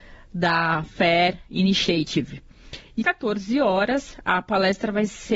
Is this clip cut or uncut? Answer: cut